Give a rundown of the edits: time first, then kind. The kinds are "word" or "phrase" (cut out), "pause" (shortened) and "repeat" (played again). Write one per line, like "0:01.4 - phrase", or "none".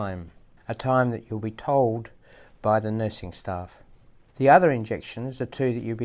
none